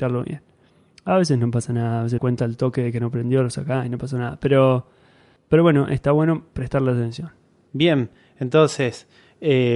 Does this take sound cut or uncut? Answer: cut